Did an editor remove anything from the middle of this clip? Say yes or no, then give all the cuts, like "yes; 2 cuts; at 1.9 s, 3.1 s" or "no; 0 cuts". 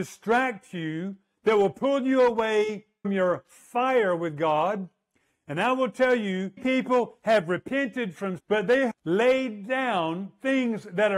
yes; 4 cuts; at 3.0 s, 6.6 s, 8.4 s, 8.9 s